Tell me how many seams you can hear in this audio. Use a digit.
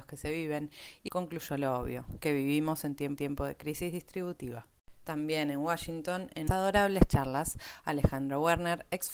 4